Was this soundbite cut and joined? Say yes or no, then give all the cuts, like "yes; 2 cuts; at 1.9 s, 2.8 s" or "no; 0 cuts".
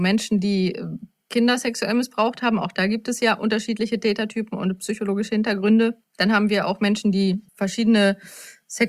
yes; 2 cuts; at 6.0 s, 7.5 s